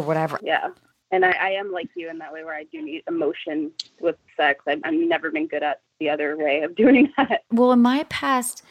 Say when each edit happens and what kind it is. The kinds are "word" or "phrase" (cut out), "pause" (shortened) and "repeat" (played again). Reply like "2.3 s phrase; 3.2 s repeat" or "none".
3.9 s pause